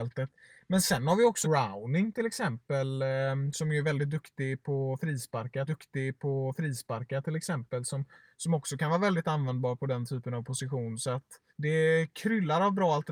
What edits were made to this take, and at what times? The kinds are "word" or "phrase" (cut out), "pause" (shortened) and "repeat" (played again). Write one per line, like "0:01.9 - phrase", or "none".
0:01.4 - phrase
0:05.7 - repeat
0:11.5 - pause

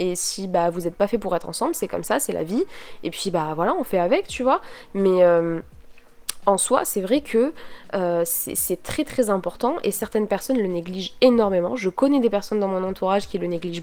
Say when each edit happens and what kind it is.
none

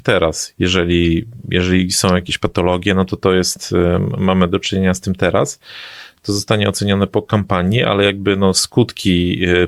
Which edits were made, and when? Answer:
none

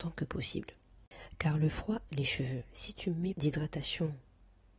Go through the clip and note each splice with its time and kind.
0:02.1 - word
0:03.3 - word

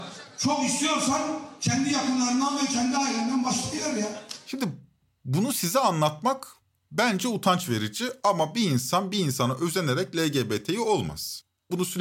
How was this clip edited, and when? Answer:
none

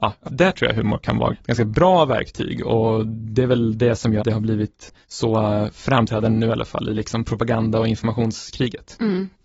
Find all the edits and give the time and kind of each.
0:04.2 - word
0:05.0 - pause

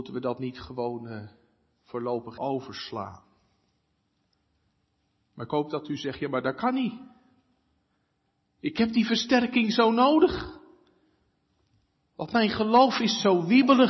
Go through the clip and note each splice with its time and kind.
0:02.4 - word

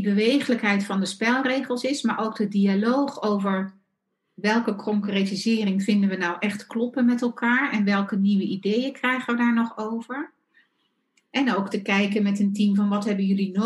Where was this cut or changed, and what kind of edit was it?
none

